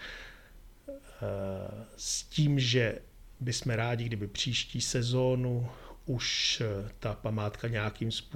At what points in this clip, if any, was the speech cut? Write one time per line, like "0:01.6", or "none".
none

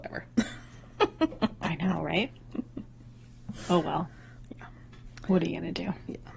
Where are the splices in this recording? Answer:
none

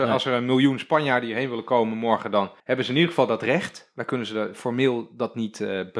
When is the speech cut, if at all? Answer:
0:02.6

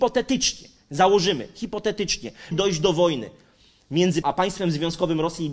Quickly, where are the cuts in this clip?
0:02.5
0:04.2

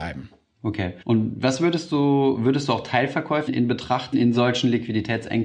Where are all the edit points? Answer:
0:01.0
0:03.5
0:04.1

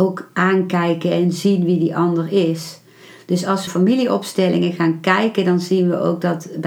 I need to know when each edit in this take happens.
0:03.7

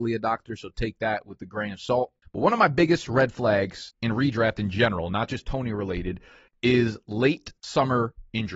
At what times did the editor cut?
none

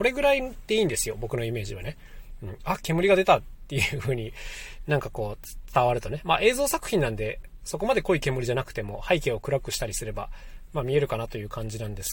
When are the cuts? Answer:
none

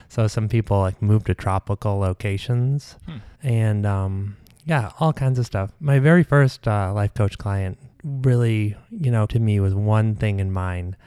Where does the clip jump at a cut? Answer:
0:03.3
0:04.9
0:07.9
0:09.3

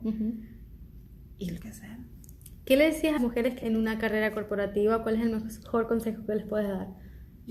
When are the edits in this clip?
0:01.6
0:03.2
0:03.6

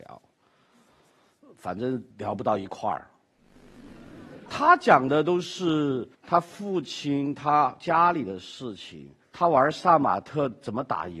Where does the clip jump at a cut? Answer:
0:02.1
0:06.1
0:09.2

